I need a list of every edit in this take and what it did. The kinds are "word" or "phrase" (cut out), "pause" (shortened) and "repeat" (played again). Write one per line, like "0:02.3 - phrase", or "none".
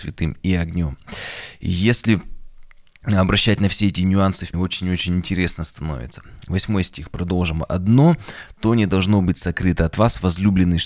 0:04.5 - word